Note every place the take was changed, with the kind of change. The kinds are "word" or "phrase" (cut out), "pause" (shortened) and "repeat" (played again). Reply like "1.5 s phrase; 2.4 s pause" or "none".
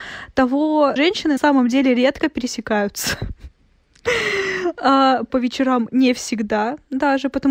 1.0 s phrase; 1.4 s word; 5.3 s phrase